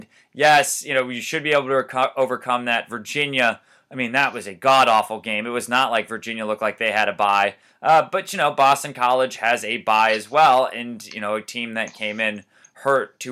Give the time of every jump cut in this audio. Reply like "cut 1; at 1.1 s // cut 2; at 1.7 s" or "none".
none